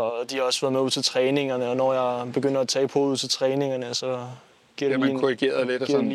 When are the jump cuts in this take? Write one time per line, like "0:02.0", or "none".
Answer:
none